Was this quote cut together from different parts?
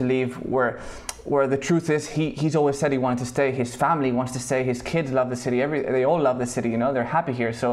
no; 0 cuts

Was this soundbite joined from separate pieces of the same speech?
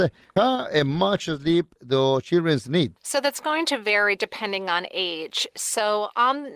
no; 0 cuts

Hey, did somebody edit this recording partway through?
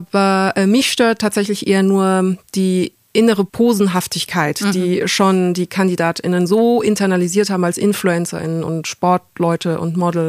yes; 1 cut; at 3.5 s

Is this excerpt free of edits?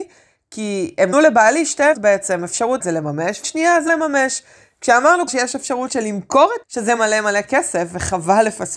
no; 9 cuts; at 1.1 s, 1.9 s, 2.8 s, 3.4 s, 3.9 s, 5.3 s, 5.9 s, 6.6 s, 7.0 s

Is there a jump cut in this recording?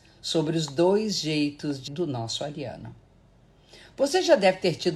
yes; 1 cut; at 1.9 s

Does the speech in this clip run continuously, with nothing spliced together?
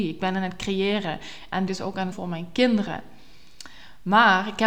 no; 2 cuts; at 1.7 s, 2.1 s

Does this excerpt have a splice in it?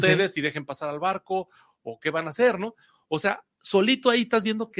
no; 0 cuts

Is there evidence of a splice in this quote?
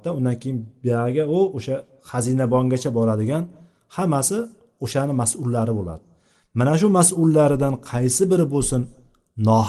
no; 0 cuts

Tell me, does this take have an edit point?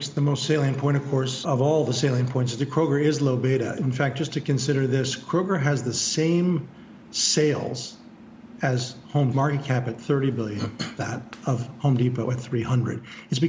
yes; 3 cuts; at 1.4 s, 9.3 s, 11.0 s

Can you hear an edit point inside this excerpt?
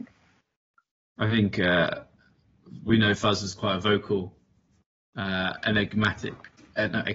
no; 0 cuts

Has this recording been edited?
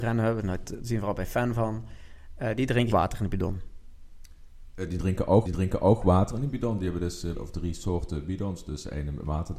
yes; 3 cuts; at 2.9 s, 5.5 s, 7.3 s

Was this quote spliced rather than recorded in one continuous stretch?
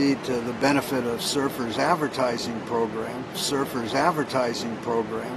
yes; 1 cut; at 3.3 s

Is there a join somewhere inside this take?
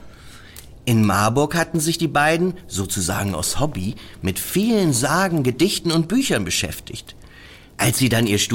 no; 0 cuts

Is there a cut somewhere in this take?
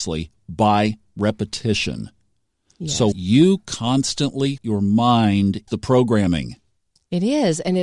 yes; 3 cuts; at 3.1 s, 4.6 s, 5.7 s

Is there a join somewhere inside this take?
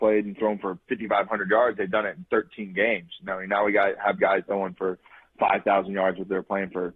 no; 0 cuts

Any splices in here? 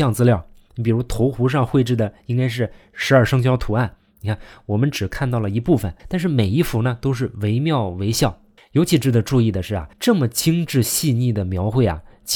yes; 3 cuts; at 6.0 s, 8.6 s, 9.9 s

